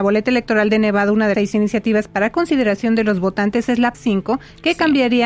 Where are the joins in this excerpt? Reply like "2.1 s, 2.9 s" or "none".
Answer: 1.3 s, 3.9 s